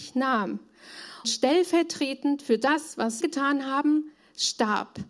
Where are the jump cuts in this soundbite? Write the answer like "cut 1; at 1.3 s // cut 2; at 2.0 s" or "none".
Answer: cut 1; at 1.2 s // cut 2; at 3.2 s